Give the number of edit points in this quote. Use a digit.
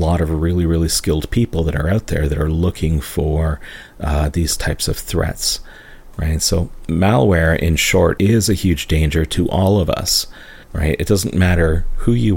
2